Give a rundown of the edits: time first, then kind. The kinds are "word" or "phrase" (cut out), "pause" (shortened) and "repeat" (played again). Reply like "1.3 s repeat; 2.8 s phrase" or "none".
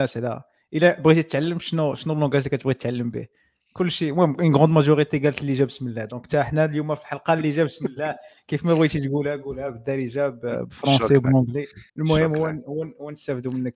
11.9 s pause